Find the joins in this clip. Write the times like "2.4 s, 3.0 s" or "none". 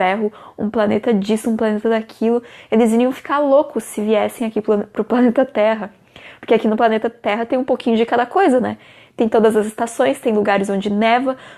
none